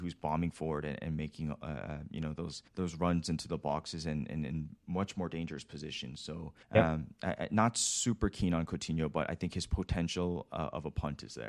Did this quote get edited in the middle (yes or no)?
yes